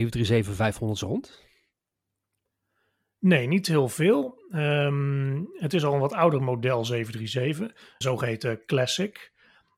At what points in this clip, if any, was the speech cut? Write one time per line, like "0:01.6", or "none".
0:08.0